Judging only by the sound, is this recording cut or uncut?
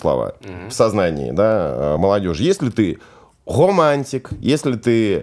uncut